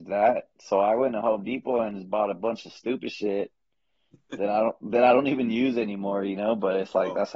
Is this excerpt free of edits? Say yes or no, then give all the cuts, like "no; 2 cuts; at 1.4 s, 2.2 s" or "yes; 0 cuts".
yes; 0 cuts